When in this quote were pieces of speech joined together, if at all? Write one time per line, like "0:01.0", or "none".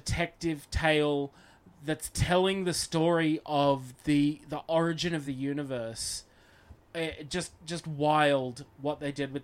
none